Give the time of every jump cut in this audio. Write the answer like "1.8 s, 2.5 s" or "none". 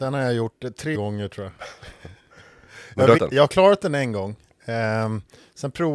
0.9 s, 3.2 s